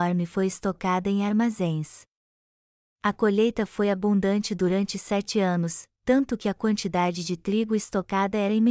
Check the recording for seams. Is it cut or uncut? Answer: uncut